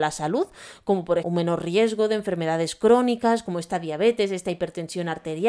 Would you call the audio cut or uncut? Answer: cut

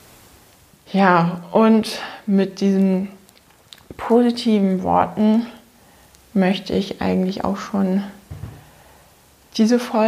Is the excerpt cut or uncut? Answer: uncut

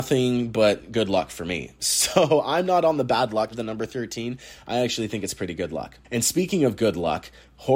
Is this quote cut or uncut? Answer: cut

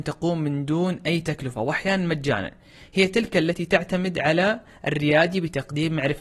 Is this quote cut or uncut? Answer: uncut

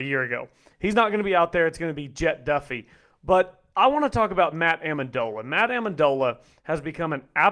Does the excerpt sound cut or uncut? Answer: uncut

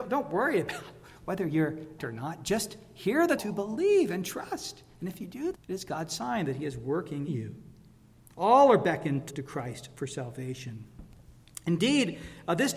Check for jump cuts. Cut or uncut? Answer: cut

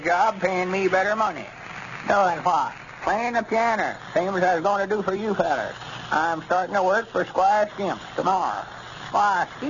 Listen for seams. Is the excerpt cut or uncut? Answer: uncut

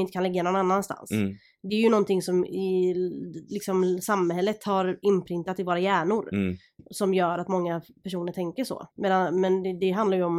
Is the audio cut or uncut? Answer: cut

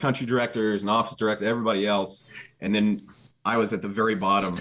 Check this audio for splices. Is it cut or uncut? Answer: uncut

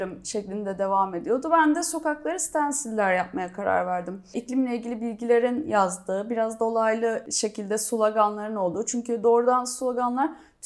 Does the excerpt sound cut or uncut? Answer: uncut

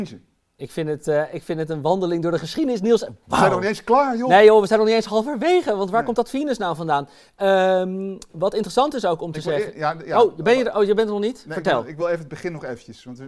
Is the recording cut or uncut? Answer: uncut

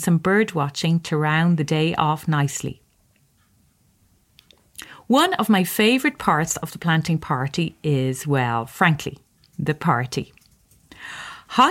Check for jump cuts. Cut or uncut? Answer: uncut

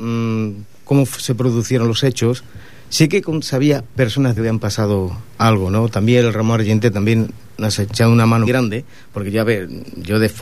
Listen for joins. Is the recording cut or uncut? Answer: cut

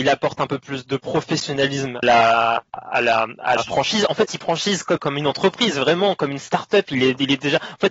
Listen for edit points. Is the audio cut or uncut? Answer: cut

